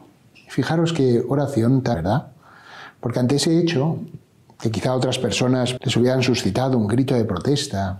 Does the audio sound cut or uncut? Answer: cut